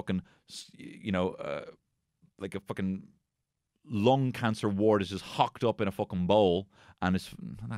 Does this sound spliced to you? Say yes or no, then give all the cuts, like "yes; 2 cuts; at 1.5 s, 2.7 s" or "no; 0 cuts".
no; 0 cuts